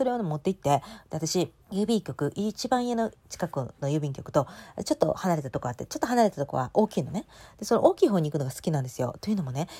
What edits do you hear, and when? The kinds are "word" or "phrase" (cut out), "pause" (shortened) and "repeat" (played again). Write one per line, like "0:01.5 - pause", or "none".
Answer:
0:01.6 - pause